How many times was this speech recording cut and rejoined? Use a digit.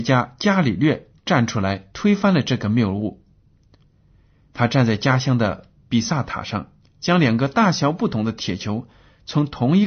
2